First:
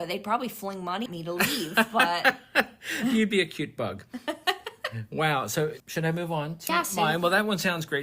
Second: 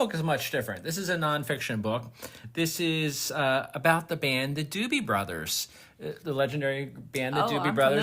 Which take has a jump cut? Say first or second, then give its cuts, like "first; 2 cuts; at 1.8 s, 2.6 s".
first; 3 cuts; at 1.1 s, 5.8 s, 6.7 s